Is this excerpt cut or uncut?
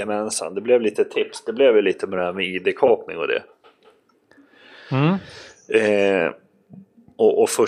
uncut